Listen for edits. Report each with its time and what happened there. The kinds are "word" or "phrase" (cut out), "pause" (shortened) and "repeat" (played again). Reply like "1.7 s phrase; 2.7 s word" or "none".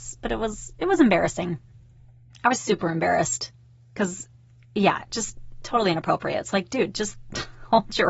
none